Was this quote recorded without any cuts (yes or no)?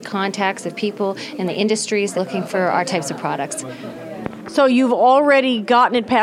no